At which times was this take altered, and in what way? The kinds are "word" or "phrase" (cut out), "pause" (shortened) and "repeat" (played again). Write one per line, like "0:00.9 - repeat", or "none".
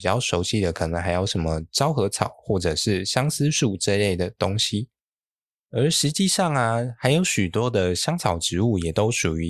0:05.3 - pause